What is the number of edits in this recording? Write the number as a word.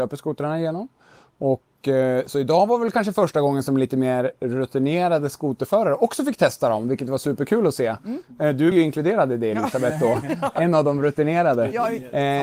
one